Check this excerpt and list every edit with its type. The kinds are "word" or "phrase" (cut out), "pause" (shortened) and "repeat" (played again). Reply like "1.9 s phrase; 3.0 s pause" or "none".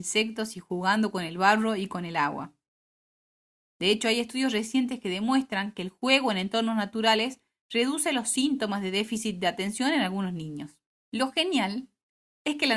none